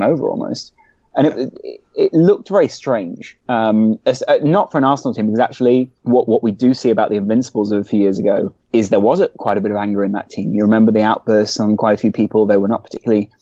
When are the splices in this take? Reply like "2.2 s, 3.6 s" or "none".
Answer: 3.4 s, 6.0 s, 8.6 s